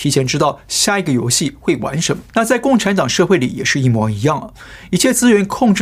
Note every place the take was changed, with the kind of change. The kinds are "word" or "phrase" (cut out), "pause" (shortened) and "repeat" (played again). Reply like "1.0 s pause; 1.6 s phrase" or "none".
2.3 s pause